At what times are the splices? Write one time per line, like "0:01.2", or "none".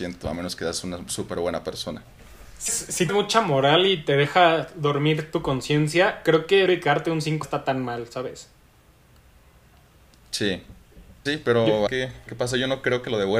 0:02.7
0:03.1
0:06.7
0:07.4
0:11.3
0:11.9
0:12.3